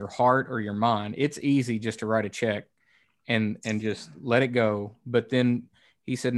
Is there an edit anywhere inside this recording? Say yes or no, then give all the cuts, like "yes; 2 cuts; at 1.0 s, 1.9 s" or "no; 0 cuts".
no; 0 cuts